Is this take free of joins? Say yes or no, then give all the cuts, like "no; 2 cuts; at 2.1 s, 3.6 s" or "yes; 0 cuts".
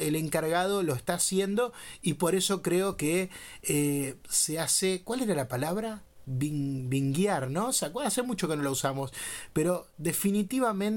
yes; 0 cuts